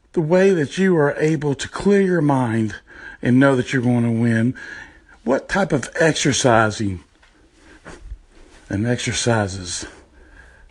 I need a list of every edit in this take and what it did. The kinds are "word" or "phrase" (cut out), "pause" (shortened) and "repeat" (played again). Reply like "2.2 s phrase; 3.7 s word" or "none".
none